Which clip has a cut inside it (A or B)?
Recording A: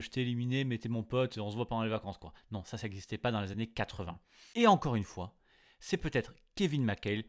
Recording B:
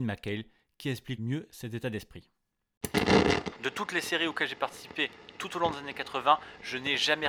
B